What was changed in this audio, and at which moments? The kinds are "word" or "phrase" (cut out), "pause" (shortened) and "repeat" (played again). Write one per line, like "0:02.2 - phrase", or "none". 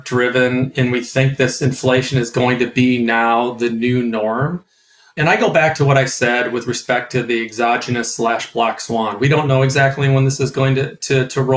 none